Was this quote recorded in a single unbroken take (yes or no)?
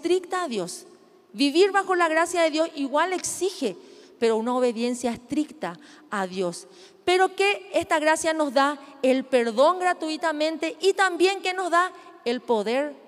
yes